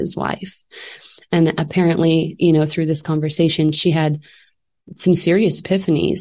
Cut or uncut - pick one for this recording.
uncut